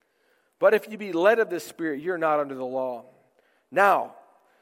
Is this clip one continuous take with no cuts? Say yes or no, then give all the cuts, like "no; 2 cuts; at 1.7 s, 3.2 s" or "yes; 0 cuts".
yes; 0 cuts